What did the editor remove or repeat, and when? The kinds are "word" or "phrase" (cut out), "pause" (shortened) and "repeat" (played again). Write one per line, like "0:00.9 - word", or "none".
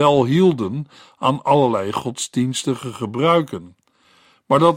none